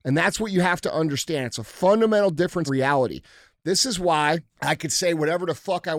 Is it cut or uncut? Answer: cut